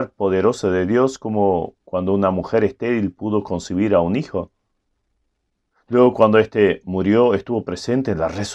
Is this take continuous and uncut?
yes; 0 cuts

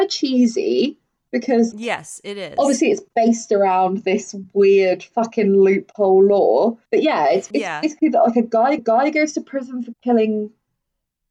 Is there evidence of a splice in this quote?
yes; 4 cuts; at 1.7 s, 6.9 s, 7.5 s, 8.8 s

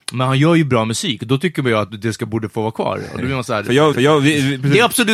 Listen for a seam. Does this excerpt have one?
yes; 1 cut; at 3.9 s

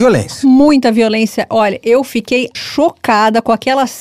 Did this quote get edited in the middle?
yes; 1 cut; at 2.5 s

